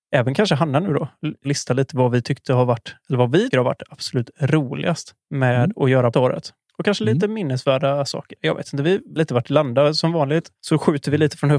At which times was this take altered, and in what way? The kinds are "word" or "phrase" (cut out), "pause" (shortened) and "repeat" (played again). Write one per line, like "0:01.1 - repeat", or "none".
0:01.4 - word
0:03.5 - word
0:05.2 - pause
0:06.1 - phrase
0:06.7 - pause
0:09.2 - word
0:10.5 - pause

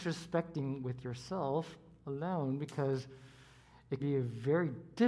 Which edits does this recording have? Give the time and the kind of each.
0:04.0 - word

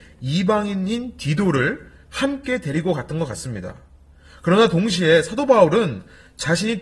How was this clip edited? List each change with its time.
none

